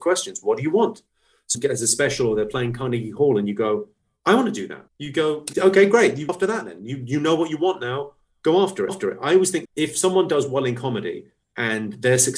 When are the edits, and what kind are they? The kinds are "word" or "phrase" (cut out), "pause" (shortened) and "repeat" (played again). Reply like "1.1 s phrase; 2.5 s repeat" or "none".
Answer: 1.5 s phrase; 4.9 s pause; 5.5 s word; 6.3 s word; 8.9 s repeat; 9.6 s word